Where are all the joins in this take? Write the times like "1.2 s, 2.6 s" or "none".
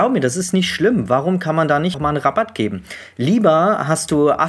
1.9 s